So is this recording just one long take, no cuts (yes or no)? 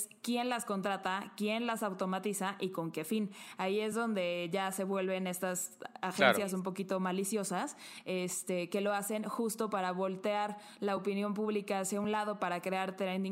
yes